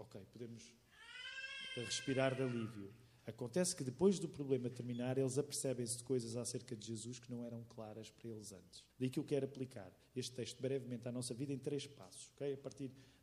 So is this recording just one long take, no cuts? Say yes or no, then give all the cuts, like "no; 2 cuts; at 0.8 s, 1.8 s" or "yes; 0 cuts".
no; 1 cut; at 8.9 s